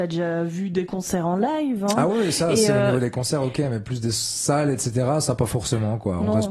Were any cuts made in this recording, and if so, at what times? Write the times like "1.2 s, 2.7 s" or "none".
none